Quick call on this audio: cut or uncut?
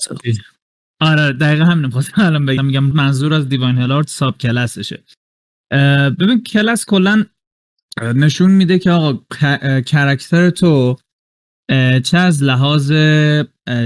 cut